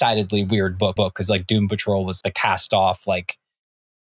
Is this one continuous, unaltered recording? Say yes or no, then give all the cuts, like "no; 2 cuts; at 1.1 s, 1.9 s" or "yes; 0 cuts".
no; 2 cuts; at 1.0 s, 2.2 s